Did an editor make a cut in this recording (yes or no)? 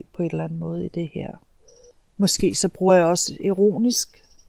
no